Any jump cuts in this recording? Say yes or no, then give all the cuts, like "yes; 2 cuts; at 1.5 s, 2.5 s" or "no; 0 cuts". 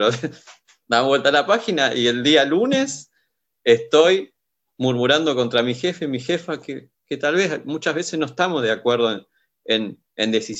no; 0 cuts